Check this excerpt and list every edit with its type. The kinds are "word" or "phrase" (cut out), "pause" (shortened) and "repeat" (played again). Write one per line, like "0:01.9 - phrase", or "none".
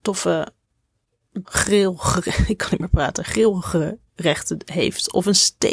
0:01.4 - word